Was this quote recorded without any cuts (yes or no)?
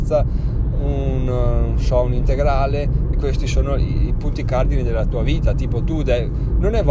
no